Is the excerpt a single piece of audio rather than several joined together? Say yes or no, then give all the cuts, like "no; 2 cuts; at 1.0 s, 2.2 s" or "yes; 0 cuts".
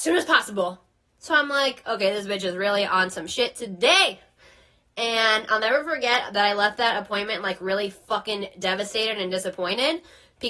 yes; 0 cuts